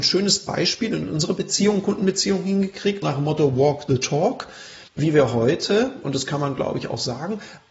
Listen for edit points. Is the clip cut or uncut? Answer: cut